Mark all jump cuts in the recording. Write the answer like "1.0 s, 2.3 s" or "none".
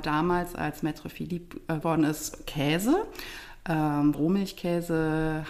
1.8 s, 4.1 s